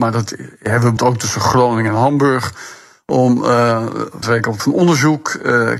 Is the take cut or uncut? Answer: cut